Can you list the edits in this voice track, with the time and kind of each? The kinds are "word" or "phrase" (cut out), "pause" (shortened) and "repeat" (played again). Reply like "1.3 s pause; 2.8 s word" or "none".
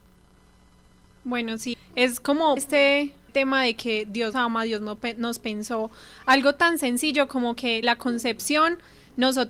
1.7 s word; 2.6 s phrase; 3.3 s phrase; 4.3 s word; 7.8 s word